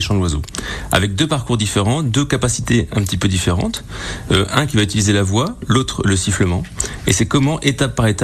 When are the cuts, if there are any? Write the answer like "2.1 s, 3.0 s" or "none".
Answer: none